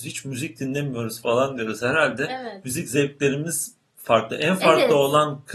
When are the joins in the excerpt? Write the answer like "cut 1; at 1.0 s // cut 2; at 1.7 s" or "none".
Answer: none

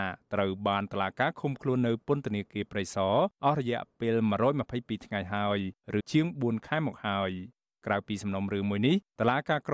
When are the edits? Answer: cut 1; at 6.0 s

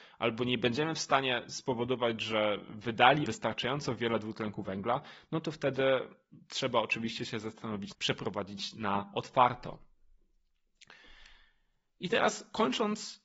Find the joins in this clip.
cut 1; at 3.2 s // cut 2; at 7.9 s

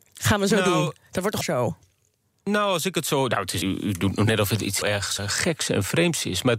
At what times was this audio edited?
cut 1; at 1.4 s // cut 2; at 3.6 s // cut 3; at 4.8 s // cut 4; at 5.2 s

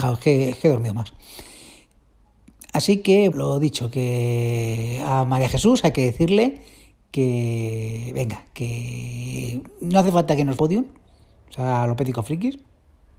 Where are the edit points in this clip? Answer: cut 1; at 3.3 s // cut 2; at 10.6 s

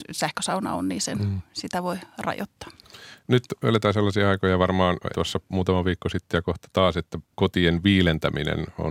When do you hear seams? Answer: cut 1; at 5.1 s // cut 2; at 7.2 s

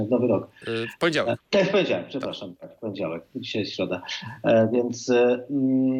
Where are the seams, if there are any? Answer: none

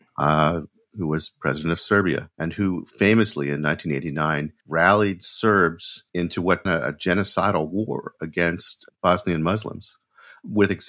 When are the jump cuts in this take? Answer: cut 1; at 2.3 s // cut 2; at 4.6 s // cut 3; at 6.1 s // cut 4; at 6.7 s

